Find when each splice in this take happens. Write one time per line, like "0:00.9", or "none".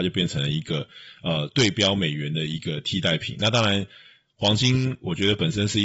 none